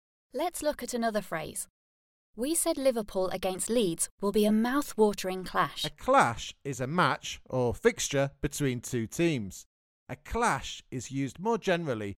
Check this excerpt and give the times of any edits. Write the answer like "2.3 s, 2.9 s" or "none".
none